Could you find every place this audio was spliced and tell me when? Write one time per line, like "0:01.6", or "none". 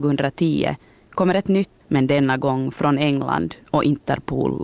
0:01.8